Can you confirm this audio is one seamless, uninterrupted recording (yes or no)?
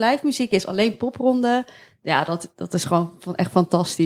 yes